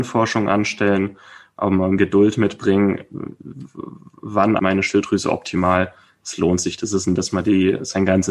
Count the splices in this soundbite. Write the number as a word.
three